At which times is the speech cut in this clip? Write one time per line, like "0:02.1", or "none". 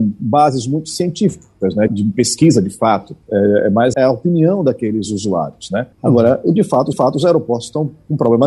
0:01.9
0:03.2
0:03.9
0:05.9
0:06.9